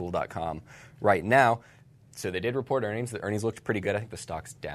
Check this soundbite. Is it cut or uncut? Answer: uncut